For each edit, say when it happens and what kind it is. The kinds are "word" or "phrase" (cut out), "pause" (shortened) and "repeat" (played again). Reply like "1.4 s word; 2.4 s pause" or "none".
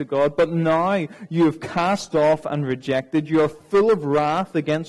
none

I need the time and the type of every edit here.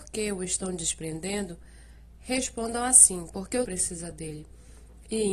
3.6 s word

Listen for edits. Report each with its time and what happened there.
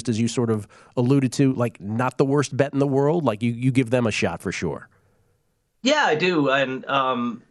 none

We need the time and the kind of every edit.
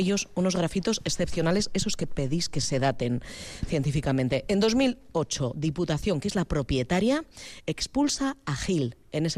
none

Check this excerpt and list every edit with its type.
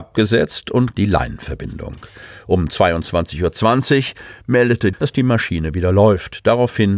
0.9 s word; 4.9 s phrase

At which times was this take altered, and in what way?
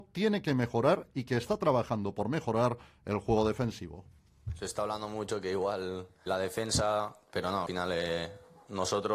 6.3 s word

